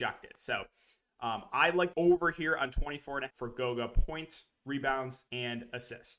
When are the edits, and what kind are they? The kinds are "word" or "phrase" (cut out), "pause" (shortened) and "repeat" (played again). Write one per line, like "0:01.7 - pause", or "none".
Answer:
0:01.9 - word
0:03.3 - word
0:05.3 - pause